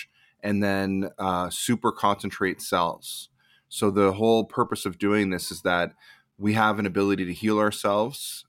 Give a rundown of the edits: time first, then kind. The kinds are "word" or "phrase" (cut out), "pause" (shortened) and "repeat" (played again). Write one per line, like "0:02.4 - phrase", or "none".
none